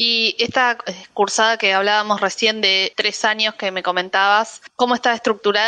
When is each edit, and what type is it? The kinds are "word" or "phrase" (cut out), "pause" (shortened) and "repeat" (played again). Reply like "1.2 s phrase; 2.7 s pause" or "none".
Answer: 2.9 s word; 4.7 s pause